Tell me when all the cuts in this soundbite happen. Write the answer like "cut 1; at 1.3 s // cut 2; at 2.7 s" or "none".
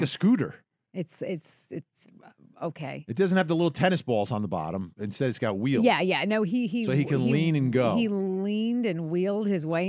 none